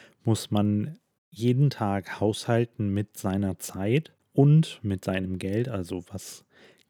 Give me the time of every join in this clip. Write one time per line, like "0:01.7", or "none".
0:01.2
0:04.2